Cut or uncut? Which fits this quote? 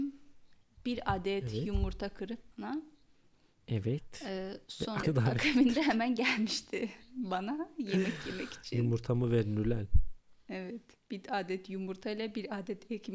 cut